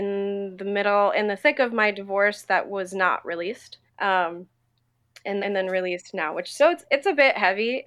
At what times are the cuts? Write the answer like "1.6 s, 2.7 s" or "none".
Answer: 3.9 s, 5.4 s, 6.8 s